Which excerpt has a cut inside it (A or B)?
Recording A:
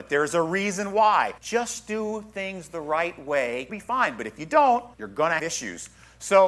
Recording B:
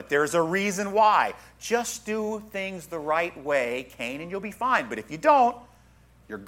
A